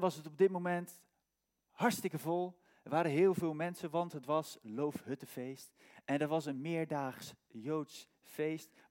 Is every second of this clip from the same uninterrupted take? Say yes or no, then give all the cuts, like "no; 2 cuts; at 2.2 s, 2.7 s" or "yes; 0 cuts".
yes; 0 cuts